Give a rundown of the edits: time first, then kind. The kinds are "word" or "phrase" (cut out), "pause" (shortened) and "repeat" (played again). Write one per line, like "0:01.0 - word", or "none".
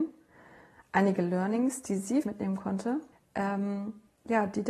0:02.2 - phrase
0:03.1 - pause